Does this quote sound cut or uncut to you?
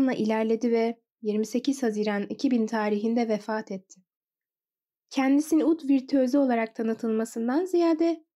uncut